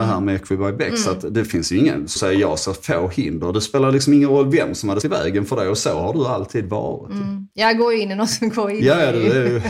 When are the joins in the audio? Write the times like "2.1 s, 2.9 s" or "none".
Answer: 2.2 s, 5.0 s, 7.5 s